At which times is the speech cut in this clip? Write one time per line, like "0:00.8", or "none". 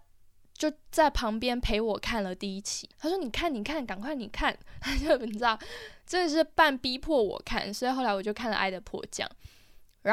0:02.9